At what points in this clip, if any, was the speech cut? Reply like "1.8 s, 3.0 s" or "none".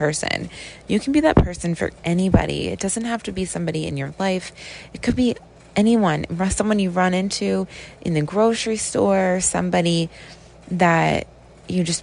none